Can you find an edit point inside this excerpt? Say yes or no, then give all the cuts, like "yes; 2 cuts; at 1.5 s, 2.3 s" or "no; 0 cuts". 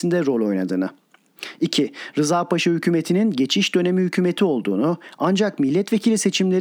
no; 0 cuts